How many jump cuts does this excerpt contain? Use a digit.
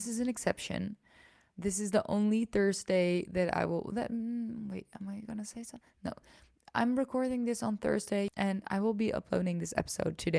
0